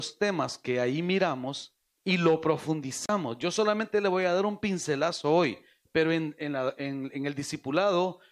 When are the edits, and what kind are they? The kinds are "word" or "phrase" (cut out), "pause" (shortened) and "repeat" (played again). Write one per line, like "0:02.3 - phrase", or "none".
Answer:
none